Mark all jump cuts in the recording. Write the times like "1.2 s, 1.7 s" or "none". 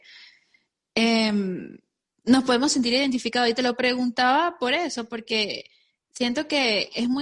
none